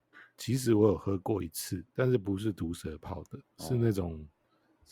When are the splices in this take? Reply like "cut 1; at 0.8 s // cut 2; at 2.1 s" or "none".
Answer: cut 1; at 1.9 s // cut 2; at 3.5 s